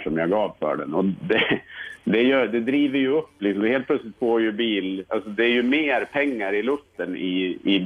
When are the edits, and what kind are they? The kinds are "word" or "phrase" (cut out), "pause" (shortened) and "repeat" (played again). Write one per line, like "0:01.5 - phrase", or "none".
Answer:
none